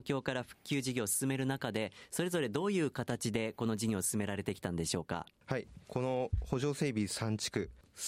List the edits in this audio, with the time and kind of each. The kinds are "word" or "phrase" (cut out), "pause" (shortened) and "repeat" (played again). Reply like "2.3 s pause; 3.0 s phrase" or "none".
5.8 s pause